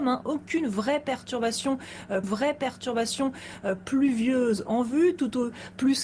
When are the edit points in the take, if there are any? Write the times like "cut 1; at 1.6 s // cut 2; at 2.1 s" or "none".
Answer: cut 1; at 2.2 s

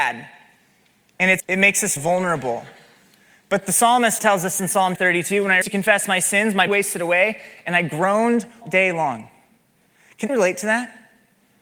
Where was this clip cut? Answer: cut 1; at 1.4 s // cut 2; at 2.0 s // cut 3; at 4.2 s // cut 4; at 4.6 s // cut 5; at 5.0 s // cut 6; at 5.6 s // cut 7; at 6.7 s // cut 8; at 8.6 s // cut 9; at 10.3 s

